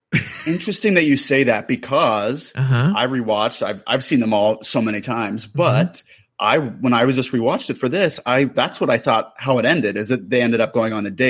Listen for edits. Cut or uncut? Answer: uncut